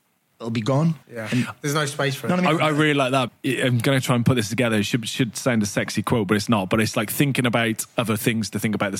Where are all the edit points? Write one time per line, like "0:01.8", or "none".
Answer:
0:01.0
0:03.3